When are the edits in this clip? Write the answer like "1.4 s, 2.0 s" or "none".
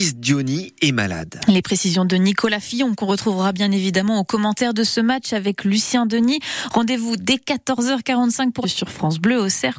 8.6 s

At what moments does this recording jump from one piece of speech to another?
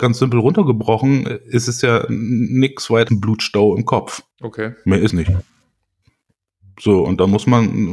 3.1 s, 4.3 s, 5.1 s

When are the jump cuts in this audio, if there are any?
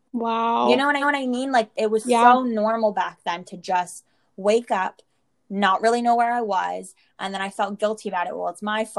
1.0 s, 1.7 s

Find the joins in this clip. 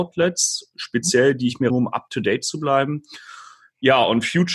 1.7 s

